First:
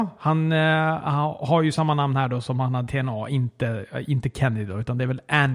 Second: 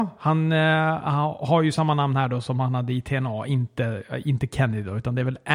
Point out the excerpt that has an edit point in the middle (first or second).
first